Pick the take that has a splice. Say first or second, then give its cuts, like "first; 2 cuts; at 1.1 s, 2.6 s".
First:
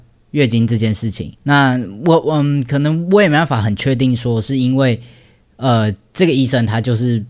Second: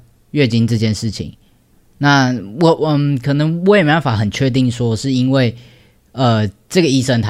first; 1 cut; at 1.4 s